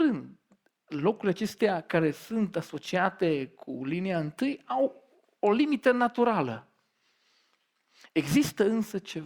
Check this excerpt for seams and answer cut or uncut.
uncut